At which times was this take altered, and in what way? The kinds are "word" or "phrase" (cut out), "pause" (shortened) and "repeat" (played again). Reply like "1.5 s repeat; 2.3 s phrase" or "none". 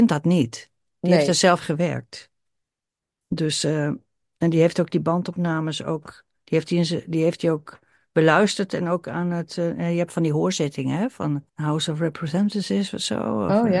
11.5 s pause